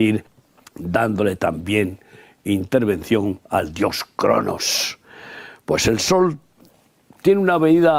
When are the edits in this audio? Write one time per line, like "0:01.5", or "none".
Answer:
0:03.4